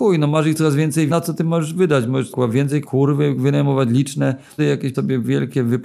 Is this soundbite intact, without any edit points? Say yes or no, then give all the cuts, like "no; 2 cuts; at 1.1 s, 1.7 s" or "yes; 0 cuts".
no; 5 cuts; at 1.1 s, 2.3 s, 2.8 s, 4.6 s, 4.9 s